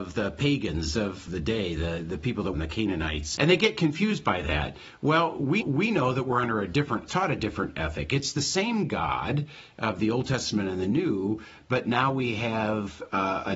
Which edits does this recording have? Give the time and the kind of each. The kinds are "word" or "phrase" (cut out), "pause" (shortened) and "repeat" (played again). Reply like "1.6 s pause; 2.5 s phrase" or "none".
1.3 s phrase; 2.5 s phrase; 3.4 s word; 5.6 s repeat; 7.1 s phrase